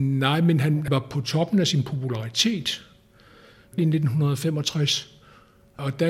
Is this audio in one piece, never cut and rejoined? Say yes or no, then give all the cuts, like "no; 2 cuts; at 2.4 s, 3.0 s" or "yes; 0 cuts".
no; 1 cut; at 3.8 s